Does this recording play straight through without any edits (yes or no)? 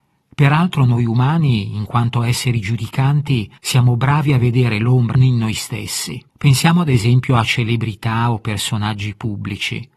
no